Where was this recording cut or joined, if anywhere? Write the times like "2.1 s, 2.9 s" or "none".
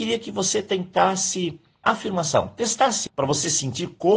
1.8 s, 3.1 s